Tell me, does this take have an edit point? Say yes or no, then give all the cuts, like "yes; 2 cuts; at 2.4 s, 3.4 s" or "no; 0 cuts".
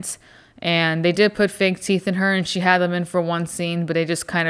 no; 0 cuts